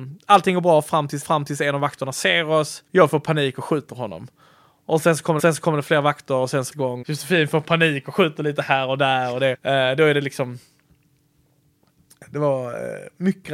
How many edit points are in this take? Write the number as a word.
seven